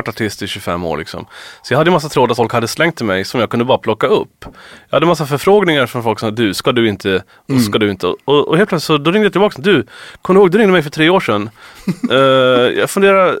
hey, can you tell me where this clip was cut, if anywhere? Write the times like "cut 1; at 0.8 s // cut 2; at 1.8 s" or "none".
cut 1; at 2.4 s